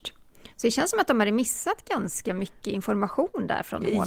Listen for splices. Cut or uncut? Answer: uncut